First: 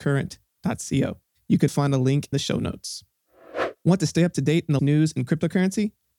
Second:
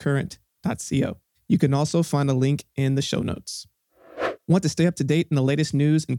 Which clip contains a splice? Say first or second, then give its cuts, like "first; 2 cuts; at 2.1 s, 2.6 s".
first; 3 cuts; at 1.7 s, 2.3 s, 4.8 s